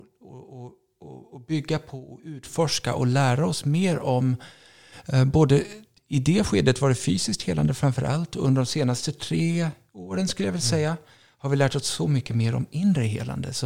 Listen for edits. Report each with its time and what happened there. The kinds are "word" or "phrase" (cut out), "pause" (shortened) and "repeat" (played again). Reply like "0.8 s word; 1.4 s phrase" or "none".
6.0 s word